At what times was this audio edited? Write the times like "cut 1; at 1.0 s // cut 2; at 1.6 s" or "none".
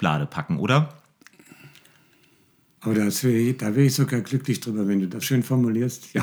cut 1; at 5.2 s